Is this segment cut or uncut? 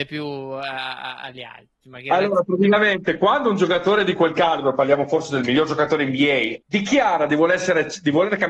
cut